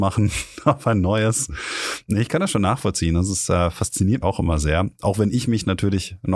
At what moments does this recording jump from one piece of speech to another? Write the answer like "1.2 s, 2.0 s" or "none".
4.2 s